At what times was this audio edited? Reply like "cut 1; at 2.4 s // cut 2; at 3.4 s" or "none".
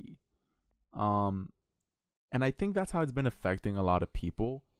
none